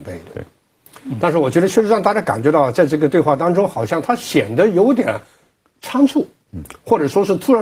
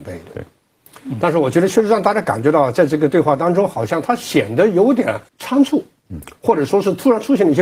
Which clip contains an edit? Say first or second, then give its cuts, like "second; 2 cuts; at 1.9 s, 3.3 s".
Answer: second; 1 cut; at 5.3 s